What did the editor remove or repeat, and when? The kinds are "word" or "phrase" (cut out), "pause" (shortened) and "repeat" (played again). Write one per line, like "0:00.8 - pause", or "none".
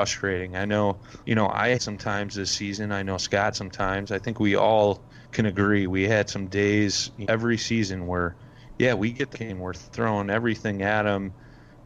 0:01.2 - pause
0:01.8 - word
0:03.5 - word
0:05.2 - pause
0:07.2 - word
0:09.3 - word